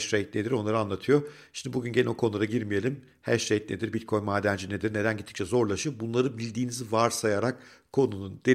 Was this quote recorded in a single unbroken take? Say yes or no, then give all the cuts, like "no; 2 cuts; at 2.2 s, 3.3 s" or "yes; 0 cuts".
yes; 0 cuts